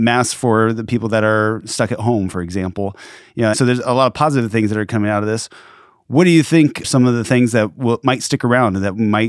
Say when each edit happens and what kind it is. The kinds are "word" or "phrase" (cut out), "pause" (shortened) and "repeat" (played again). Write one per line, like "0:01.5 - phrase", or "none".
0:03.5 - word
0:06.8 - word